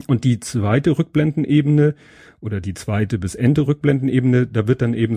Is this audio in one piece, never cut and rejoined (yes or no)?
yes